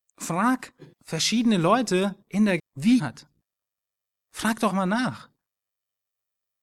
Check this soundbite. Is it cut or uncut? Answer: cut